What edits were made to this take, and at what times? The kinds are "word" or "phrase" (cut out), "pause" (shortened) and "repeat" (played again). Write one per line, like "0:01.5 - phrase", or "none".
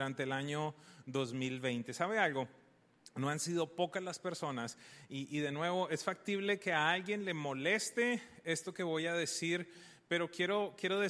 none